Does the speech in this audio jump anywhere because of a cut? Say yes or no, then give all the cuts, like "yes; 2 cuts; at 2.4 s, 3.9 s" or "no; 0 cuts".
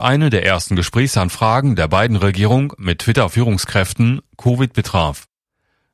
no; 0 cuts